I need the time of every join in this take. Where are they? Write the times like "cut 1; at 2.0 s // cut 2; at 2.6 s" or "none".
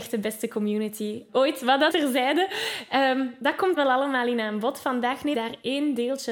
cut 1; at 1.3 s // cut 2; at 1.9 s // cut 3; at 3.8 s // cut 4; at 5.3 s